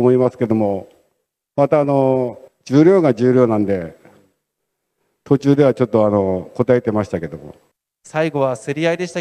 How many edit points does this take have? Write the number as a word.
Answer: two